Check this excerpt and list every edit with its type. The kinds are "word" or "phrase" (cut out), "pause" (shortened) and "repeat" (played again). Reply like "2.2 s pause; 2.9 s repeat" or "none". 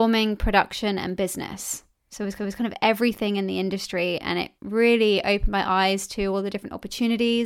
2.4 s repeat; 4.6 s pause